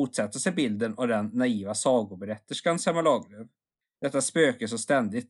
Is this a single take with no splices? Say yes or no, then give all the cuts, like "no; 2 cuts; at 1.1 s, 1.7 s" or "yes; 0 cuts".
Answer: yes; 0 cuts